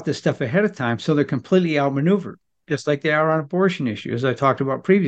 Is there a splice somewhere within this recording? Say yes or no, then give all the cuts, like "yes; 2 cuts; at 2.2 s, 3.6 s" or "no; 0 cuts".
no; 0 cuts